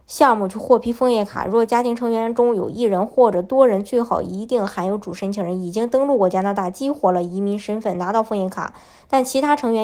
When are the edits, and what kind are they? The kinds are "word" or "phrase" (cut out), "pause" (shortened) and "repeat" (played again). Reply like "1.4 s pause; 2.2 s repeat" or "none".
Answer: none

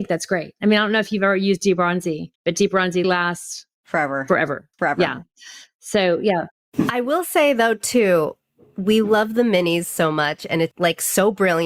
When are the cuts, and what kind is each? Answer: 2.4 s pause; 3.0 s word; 4.7 s pause; 10.7 s word

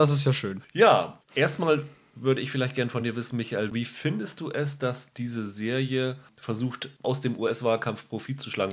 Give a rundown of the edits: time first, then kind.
none

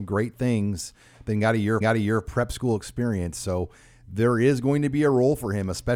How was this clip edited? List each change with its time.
1.8 s repeat

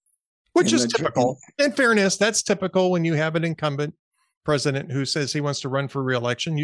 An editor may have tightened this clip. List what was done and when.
none

